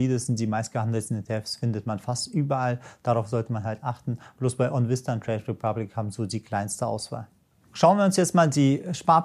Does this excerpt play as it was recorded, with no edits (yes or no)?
yes